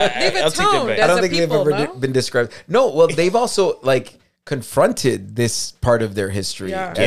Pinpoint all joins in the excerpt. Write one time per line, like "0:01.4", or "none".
none

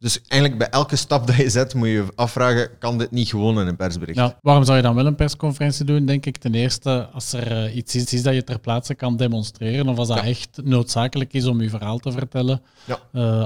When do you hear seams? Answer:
0:04.4
0:08.1

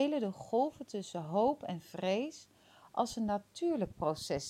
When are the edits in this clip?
none

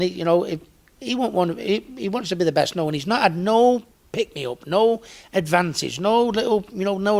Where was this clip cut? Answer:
0:03.9

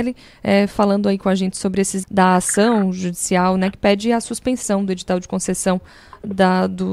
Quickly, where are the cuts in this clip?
0:02.0

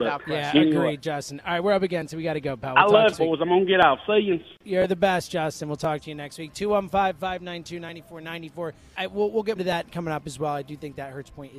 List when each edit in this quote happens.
0:03.1
0:09.0
0:09.6

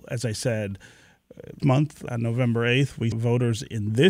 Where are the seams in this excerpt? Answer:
0:01.6
0:02.1
0:03.1

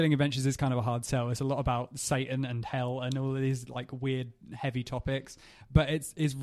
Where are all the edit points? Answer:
none

